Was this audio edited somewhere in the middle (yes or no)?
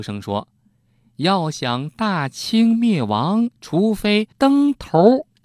yes